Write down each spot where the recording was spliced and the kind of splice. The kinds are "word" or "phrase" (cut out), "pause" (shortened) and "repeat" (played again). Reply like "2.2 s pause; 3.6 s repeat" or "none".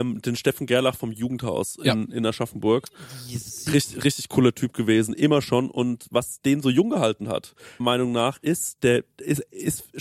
7.8 s word

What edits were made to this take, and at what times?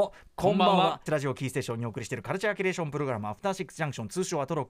1.1 s word

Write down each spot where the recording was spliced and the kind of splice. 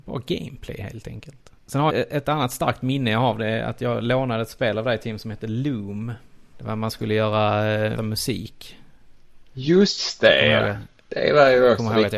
1.6 s pause; 1.9 s word; 8.0 s word

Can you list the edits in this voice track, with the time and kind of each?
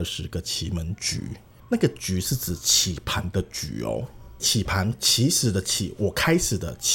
none

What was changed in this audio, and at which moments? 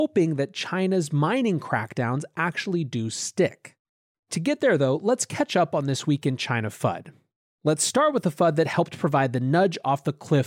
none

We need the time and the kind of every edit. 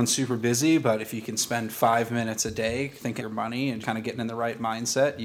3.2 s word; 3.8 s word

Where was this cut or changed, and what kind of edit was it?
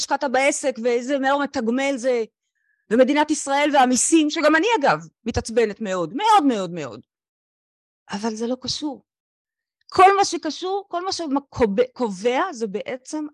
none

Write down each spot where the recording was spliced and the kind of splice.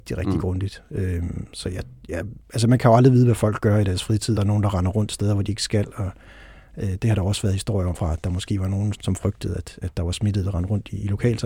2.4 s pause; 4.4 s word; 7.9 s word; 8.9 s word

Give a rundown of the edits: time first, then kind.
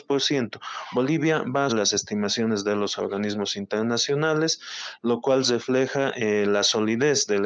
1.7 s word

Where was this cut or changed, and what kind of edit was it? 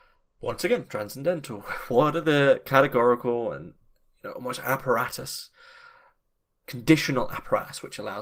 none

